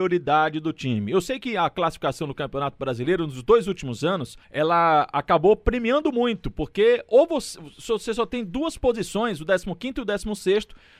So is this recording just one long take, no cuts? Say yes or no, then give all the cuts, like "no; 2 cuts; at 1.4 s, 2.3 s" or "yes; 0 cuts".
no; 1 cut; at 4.4 s